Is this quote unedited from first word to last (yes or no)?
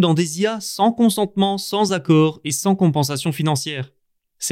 yes